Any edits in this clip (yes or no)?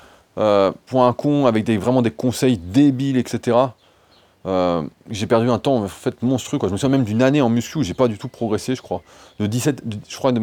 no